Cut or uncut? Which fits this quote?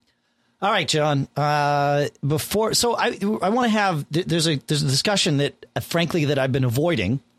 uncut